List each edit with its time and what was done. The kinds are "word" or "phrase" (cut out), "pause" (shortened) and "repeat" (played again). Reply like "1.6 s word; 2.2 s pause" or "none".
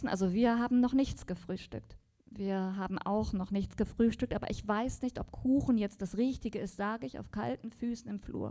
none